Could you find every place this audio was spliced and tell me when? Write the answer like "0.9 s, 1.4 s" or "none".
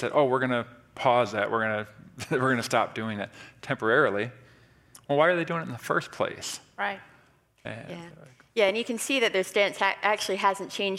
none